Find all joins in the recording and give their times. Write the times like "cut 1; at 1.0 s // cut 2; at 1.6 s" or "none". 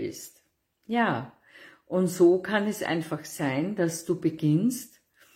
none